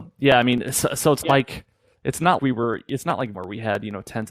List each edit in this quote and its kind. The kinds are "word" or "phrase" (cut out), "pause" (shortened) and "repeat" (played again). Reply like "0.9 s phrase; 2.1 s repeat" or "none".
1.2 s word; 2.4 s word; 3.3 s word